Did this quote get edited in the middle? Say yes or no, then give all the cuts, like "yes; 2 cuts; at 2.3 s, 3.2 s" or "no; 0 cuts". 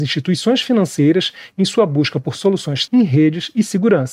yes; 1 cut; at 2.9 s